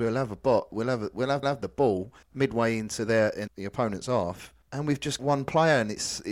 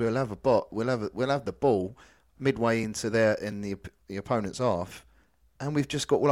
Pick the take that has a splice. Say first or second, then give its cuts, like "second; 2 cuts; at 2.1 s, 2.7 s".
first; 5 cuts; at 1.4 s, 2.2 s, 3.5 s, 4.6 s, 5.2 s